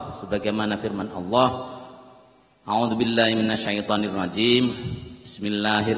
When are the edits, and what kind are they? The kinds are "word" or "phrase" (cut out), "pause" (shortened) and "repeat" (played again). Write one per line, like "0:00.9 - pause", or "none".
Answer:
none